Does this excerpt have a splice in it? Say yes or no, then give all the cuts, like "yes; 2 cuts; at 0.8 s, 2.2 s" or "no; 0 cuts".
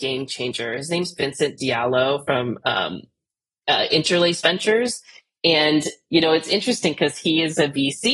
no; 0 cuts